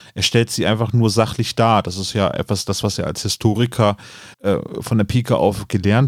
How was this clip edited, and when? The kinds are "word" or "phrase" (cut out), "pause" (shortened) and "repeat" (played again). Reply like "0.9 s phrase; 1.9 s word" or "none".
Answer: 4.3 s pause